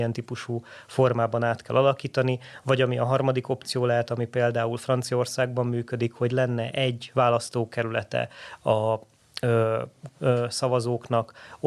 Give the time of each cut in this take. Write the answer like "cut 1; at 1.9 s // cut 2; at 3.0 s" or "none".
cut 1; at 10.1 s